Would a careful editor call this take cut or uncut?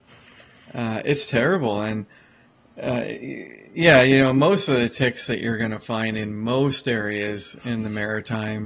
uncut